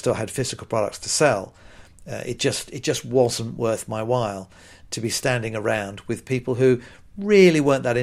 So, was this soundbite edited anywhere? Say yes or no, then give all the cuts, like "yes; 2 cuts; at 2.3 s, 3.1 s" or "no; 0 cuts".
no; 0 cuts